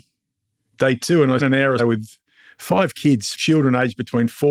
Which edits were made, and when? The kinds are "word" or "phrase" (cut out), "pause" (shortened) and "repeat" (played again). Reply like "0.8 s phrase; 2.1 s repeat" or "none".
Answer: 1.4 s word; 1.8 s word; 3.3 s word